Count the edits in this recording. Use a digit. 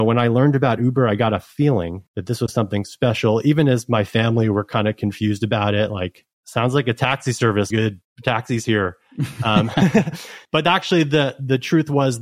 5